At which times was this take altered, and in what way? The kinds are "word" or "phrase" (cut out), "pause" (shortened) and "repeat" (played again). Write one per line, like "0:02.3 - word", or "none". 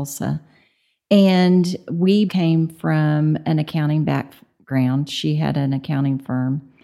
0:02.3 - word